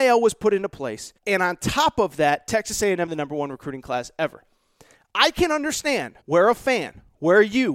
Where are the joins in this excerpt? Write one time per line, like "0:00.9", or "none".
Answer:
0:01.2
0:03.1
0:06.2